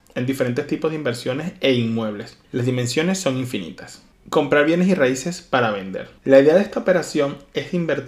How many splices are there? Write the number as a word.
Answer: two